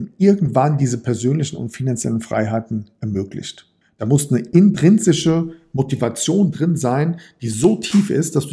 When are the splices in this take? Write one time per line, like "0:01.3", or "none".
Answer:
0:03.8